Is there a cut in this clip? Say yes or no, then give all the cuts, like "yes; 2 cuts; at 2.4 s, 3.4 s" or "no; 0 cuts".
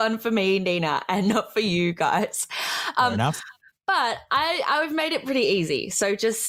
no; 0 cuts